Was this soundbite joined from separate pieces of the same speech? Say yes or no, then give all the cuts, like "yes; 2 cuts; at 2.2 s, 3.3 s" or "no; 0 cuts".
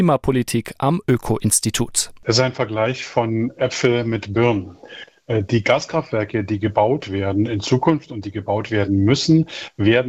no; 0 cuts